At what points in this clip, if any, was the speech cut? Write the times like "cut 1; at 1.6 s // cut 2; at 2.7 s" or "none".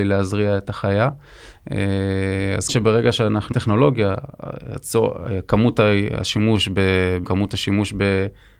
cut 1; at 2.7 s // cut 2; at 3.5 s // cut 3; at 7.2 s